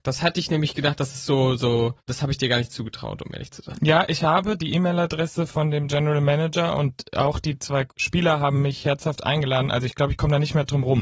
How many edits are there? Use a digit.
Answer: 1